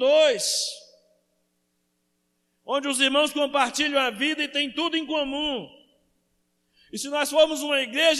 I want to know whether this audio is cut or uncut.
uncut